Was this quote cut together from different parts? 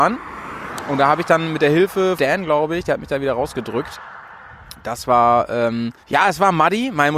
yes; 2 cuts; at 2.2 s, 6.0 s

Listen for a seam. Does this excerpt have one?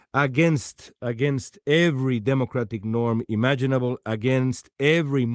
no; 0 cuts

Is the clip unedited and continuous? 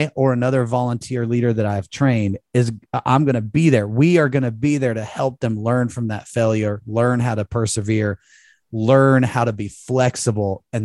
yes; 0 cuts

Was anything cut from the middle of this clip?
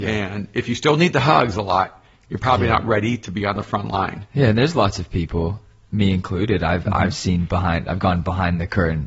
no; 0 cuts

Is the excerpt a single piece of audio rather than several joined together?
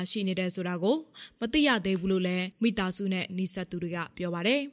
no; 1 cut; at 2.5 s

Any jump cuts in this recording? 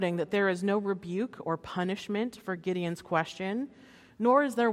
no; 0 cuts

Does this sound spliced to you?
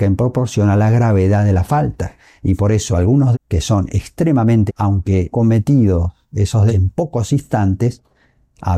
yes; 4 cuts; at 3.3 s, 4.7 s, 5.3 s, 6.7 s

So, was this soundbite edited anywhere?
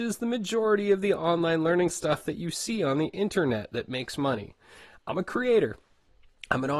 no; 0 cuts

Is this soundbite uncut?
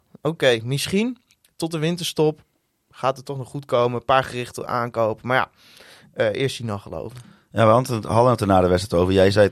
yes; 0 cuts

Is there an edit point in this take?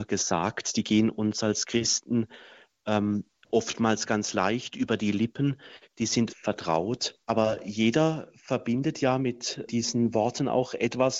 yes; 3 cuts; at 6.3 s, 7.2 s, 9.7 s

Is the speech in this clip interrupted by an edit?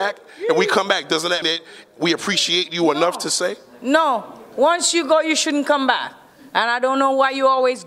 yes; 1 cut; at 1.4 s

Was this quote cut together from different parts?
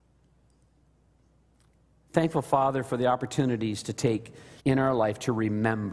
yes; 1 cut; at 4.6 s

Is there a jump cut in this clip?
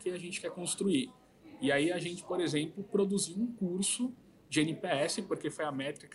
no; 0 cuts

